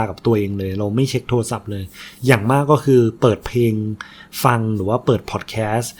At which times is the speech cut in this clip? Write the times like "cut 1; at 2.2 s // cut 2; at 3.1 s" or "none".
none